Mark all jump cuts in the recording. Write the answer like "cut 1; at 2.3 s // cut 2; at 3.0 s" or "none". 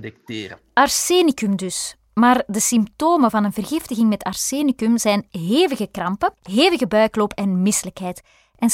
cut 1; at 6.4 s